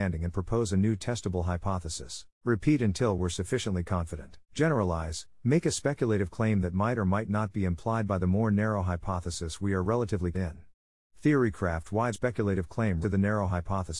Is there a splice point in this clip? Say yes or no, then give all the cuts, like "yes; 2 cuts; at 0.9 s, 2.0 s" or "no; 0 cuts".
yes; 5 cuts; at 2.3 s, 4.4 s, 10.3 s, 12.1 s, 13.0 s